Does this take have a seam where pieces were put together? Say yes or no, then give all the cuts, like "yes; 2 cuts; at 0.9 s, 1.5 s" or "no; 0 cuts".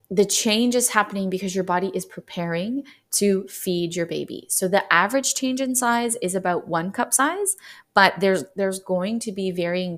no; 0 cuts